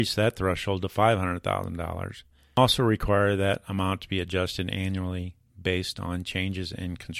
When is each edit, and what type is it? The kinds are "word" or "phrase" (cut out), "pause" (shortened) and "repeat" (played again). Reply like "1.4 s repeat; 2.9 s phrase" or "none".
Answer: none